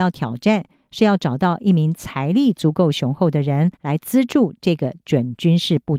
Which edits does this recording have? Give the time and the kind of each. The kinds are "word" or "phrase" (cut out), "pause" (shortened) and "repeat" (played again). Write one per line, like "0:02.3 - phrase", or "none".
0:03.7 - pause